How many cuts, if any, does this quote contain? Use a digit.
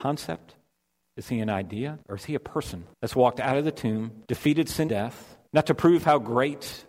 5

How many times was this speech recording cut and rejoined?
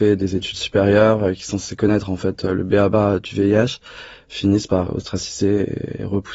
1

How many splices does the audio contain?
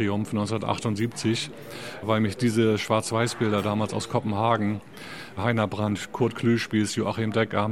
0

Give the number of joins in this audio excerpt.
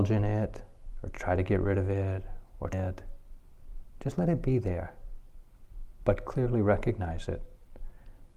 1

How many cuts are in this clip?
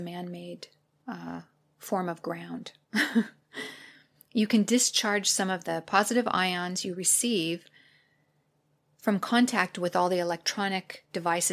0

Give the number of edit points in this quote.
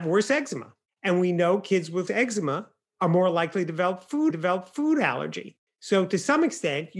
2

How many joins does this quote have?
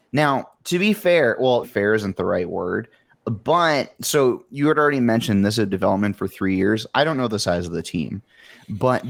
2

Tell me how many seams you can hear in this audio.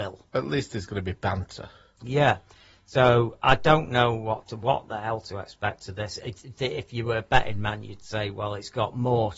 1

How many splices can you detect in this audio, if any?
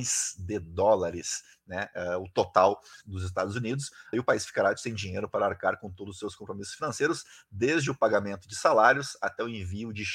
2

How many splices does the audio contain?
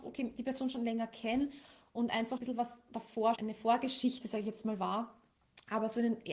2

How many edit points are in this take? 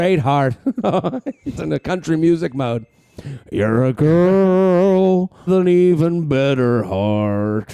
3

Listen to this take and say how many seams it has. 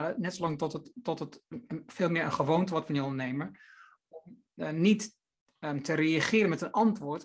0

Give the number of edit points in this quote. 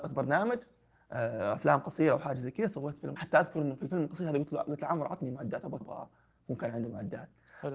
2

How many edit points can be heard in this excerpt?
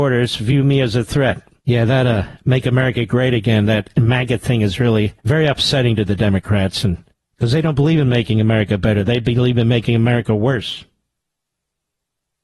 3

